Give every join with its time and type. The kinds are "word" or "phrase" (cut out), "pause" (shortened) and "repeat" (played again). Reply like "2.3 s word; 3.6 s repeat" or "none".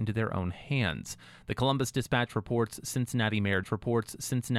3.6 s repeat

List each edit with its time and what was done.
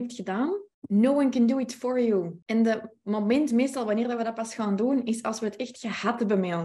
none

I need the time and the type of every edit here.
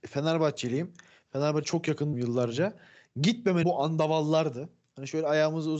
1.6 s word; 2.1 s word; 3.6 s word

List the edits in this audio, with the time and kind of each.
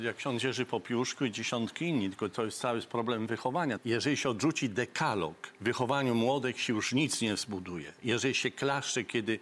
5.6 s pause

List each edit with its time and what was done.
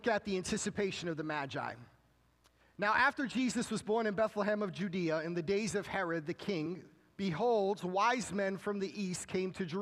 none

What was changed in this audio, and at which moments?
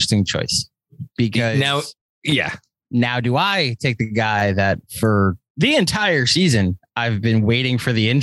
none

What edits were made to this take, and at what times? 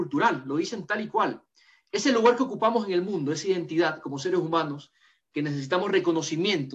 none

